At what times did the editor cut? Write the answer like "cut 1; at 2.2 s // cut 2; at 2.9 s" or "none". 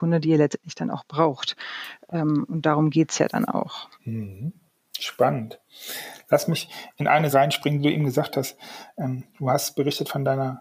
cut 1; at 3.9 s // cut 2; at 7.3 s